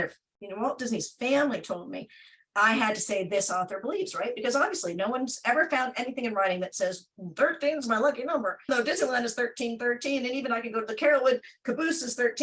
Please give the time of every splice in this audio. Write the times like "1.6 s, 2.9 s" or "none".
8.7 s

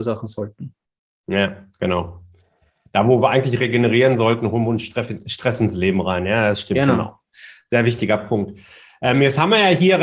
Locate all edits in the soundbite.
none

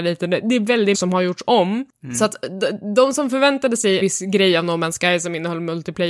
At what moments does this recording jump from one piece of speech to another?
0.9 s, 4.0 s

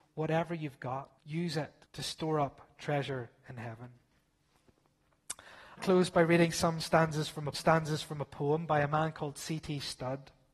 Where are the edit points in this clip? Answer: 1.2 s, 1.8 s, 5.8 s, 7.5 s

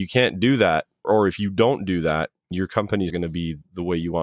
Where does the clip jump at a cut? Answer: 1.0 s, 2.5 s, 3.1 s

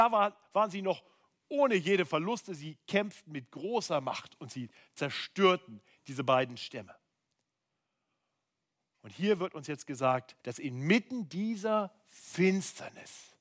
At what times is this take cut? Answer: 10.4 s

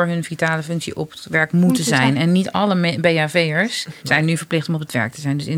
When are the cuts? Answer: 4.0 s

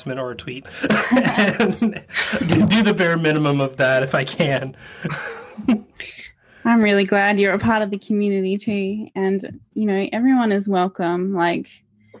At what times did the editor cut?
none

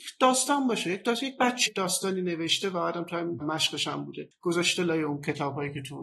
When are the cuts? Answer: 1.7 s, 3.4 s

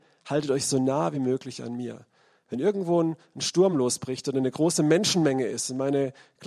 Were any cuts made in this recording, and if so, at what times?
none

